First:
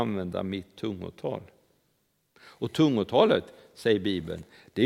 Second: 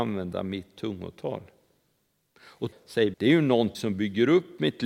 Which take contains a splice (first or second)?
second